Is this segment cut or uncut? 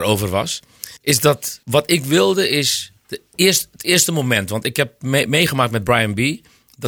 cut